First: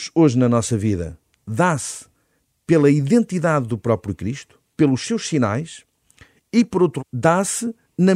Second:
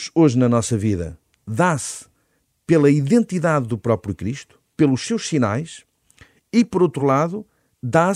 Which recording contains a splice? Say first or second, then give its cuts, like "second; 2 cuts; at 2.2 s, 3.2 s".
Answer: first; 1 cut; at 7.0 s